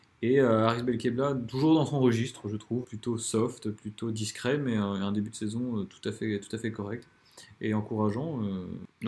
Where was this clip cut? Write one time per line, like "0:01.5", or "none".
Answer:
0:02.8